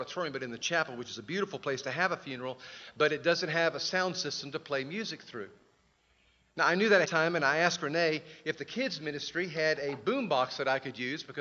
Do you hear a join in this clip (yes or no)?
yes